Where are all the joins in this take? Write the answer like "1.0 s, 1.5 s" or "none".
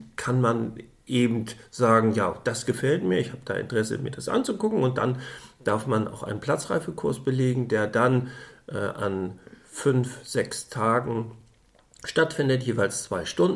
none